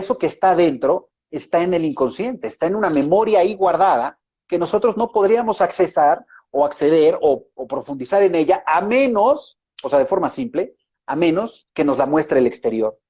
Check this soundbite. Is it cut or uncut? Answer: uncut